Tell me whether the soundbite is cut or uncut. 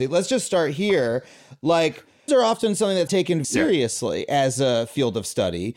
cut